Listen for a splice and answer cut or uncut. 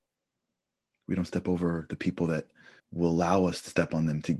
cut